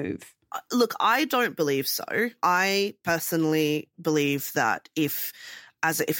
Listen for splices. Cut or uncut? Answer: uncut